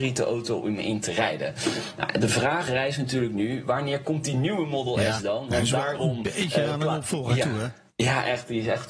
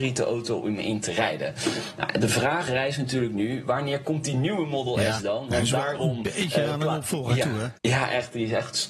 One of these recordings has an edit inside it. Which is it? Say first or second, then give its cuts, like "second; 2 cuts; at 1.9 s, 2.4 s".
second; 1 cut; at 7.8 s